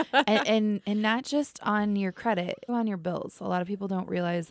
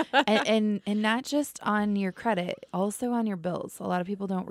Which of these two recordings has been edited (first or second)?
first